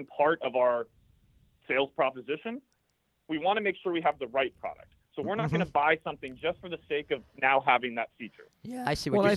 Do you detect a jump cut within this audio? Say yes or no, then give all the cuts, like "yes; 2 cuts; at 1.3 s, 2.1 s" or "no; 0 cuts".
no; 0 cuts